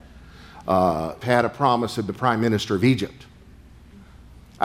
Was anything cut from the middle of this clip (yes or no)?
yes